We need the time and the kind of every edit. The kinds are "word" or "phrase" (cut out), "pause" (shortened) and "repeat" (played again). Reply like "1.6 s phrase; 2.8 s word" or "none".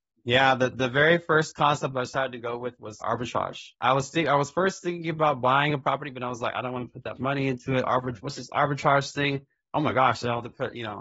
3.0 s word; 7.2 s word